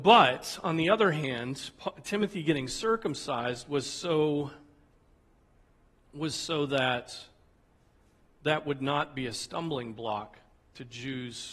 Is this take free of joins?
yes; 0 cuts

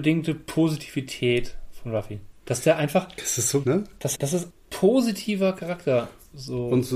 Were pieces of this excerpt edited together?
yes; 3 cuts; at 3.6 s, 4.1 s, 4.5 s

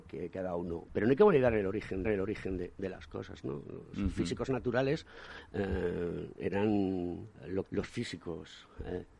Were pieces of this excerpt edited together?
yes; 2 cuts; at 2.0 s, 7.6 s

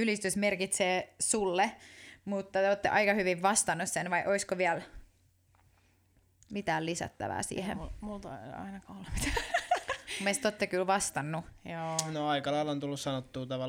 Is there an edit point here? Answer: no; 0 cuts

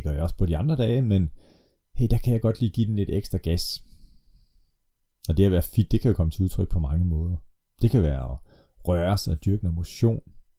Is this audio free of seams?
yes; 0 cuts

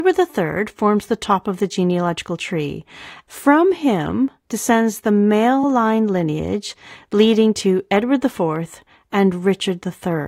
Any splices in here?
no; 0 cuts

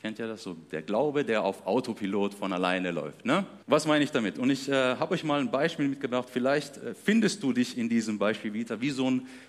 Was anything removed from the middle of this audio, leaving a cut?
yes; 1 cut; at 3.6 s

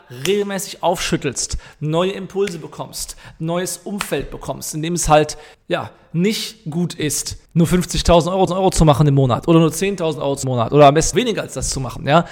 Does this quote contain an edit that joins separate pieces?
yes; 5 cuts; at 5.5 s, 7.5 s, 8.5 s, 10.4 s, 11.1 s

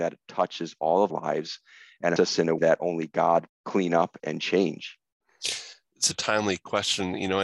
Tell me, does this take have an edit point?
yes; 6 cuts; at 1.1 s, 2.2 s, 2.6 s, 3.5 s, 4.2 s, 6.1 s

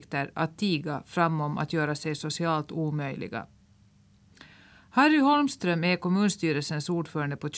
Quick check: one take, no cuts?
yes; 0 cuts

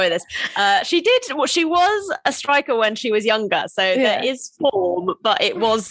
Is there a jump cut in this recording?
no; 0 cuts

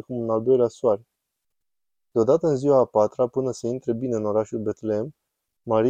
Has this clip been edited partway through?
no; 0 cuts

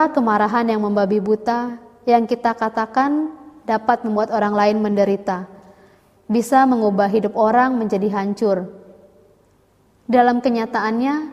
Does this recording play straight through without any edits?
yes; 0 cuts

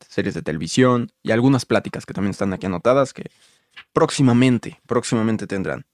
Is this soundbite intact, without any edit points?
yes; 0 cuts

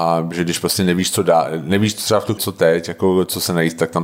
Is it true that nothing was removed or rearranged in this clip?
no; 1 cut; at 2.4 s

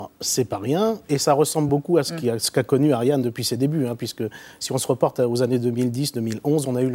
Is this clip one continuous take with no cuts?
yes; 0 cuts

